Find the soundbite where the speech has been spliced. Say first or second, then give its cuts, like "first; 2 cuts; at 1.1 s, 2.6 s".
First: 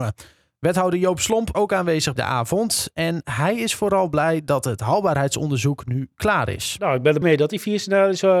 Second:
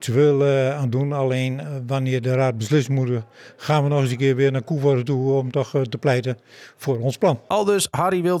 first; 3 cuts; at 1.5 s, 2.2 s, 7.2 s